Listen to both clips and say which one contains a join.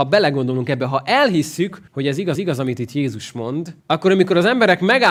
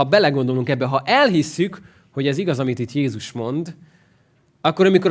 first; 3 cuts; at 1.9 s, 2.4 s, 3.8 s

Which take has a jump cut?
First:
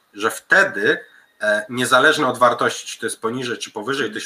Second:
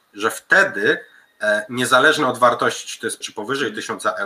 second; 1 cut; at 3.2 s

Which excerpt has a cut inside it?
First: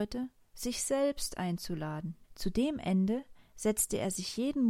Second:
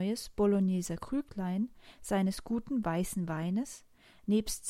first; 1 cut; at 2.2 s

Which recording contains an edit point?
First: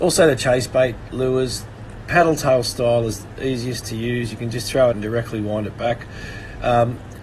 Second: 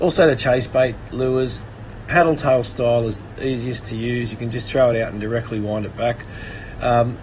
first; 1 cut; at 4.9 s

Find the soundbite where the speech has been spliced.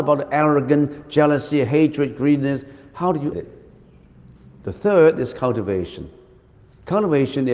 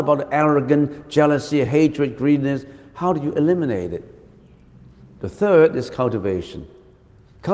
first; 1 cut; at 3.3 s

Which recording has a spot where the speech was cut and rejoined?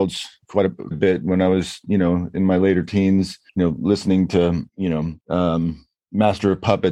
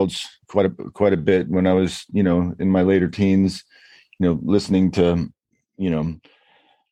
first; 4 cuts; at 0.9 s, 3.5 s, 4.7 s, 5.2 s

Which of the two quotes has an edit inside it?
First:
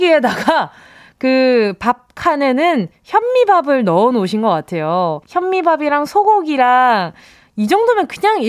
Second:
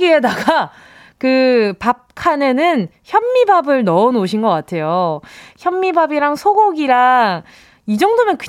first; 1 cut; at 5.2 s

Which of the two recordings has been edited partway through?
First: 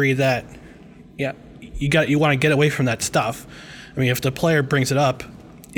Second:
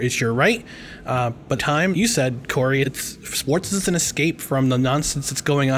second; 3 cuts; at 1.6 s, 1.9 s, 2.8 s

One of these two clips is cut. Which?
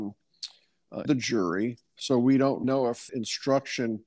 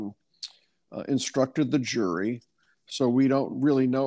first; 4 cuts; at 1.1 s, 1.9 s, 2.6 s, 3.1 s

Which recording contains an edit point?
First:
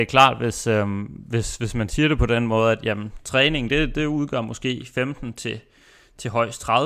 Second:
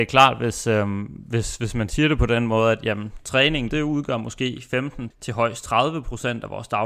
second; 2 cuts; at 3.7 s, 5.1 s

